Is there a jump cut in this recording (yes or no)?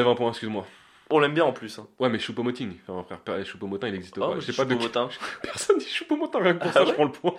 no